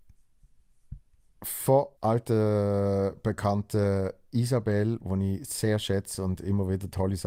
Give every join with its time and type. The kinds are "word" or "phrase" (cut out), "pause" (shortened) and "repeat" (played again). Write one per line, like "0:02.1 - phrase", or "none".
0:02.0 - pause